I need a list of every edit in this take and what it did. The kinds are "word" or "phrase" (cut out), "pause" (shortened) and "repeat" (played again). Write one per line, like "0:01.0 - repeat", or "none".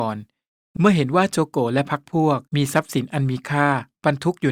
0:02.5 - pause